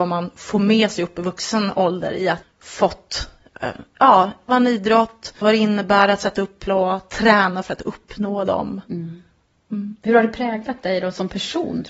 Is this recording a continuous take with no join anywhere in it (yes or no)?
no